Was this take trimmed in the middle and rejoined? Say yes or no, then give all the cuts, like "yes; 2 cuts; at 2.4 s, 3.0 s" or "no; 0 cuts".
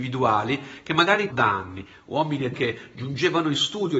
yes; 2 cuts; at 1.3 s, 2.5 s